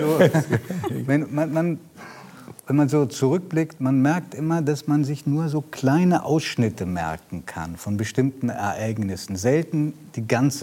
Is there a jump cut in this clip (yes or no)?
no